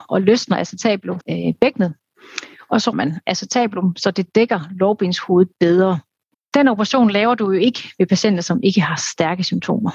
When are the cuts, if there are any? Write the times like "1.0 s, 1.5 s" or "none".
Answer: 1.2 s, 2.9 s, 6.3 s